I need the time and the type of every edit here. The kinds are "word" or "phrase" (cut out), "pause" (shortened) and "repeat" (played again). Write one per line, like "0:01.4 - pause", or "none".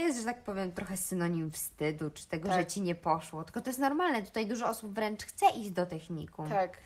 none